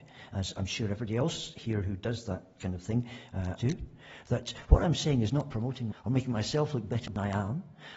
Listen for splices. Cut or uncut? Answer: cut